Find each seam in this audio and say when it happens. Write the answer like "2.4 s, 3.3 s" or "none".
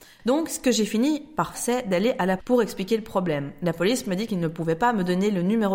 1.5 s, 2.4 s